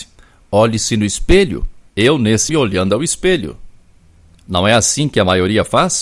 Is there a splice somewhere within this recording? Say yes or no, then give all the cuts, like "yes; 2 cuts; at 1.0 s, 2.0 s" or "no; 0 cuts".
yes; 2 cuts; at 1.9 s, 2.5 s